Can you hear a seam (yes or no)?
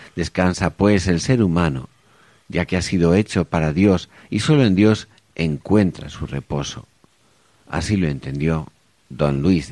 no